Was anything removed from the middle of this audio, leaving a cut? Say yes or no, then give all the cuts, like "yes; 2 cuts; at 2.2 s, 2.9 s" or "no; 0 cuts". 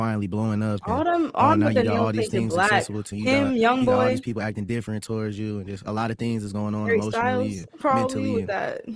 yes; 1 cut; at 3.1 s